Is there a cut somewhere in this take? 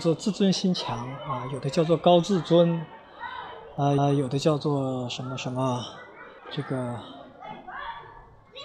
yes; 2 cuts; at 4.0 s, 6.4 s

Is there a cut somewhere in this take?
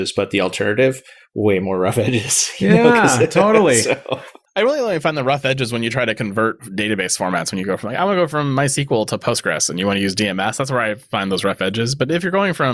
yes; 1 cut; at 6.6 s

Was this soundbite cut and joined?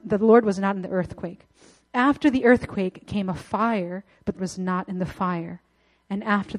yes; 1 cut; at 4.4 s

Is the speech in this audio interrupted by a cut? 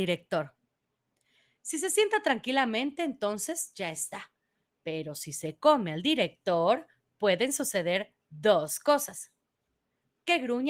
no; 0 cuts

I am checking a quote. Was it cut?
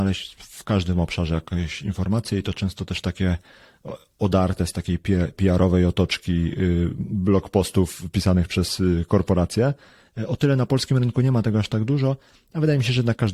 no; 0 cuts

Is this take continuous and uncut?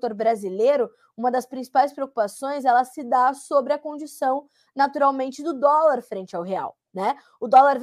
yes; 0 cuts

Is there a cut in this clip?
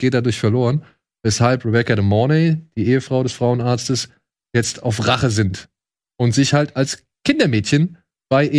no; 0 cuts

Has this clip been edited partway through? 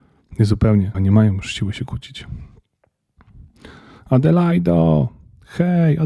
yes; 1 cut; at 0.9 s

